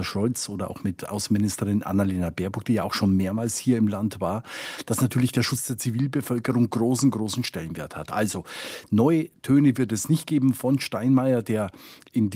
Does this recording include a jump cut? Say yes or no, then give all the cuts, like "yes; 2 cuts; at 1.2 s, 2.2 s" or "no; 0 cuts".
no; 0 cuts